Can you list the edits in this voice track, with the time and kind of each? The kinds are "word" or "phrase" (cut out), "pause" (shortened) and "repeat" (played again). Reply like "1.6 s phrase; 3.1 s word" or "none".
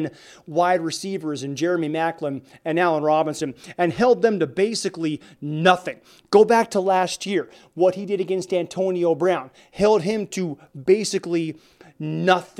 none